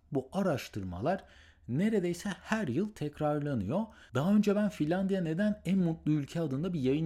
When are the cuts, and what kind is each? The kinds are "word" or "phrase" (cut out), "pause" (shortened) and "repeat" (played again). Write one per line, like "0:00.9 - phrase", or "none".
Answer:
none